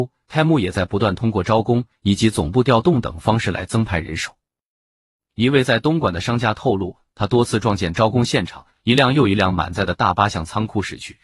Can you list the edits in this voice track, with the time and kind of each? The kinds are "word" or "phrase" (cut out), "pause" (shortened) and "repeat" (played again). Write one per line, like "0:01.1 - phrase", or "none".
0:07.9 - word